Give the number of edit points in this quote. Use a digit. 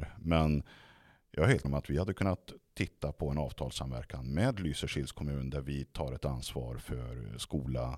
1